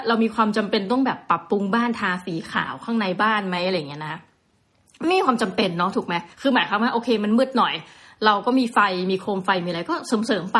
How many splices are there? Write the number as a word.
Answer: one